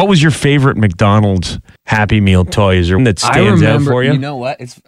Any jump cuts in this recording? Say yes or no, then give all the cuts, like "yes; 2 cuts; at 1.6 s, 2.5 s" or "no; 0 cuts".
yes; 2 cuts; at 1.8 s, 3.0 s